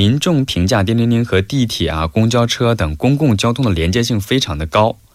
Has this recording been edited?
no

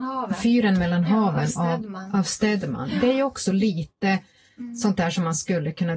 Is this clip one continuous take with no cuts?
yes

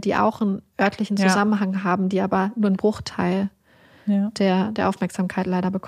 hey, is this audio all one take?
yes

